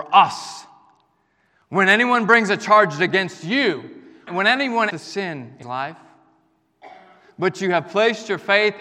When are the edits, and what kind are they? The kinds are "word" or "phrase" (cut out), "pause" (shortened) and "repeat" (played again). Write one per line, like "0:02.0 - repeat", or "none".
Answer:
0:04.3 - word
0:04.9 - phrase
0:05.6 - word